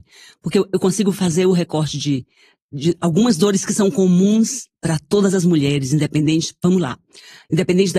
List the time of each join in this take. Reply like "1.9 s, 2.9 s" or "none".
none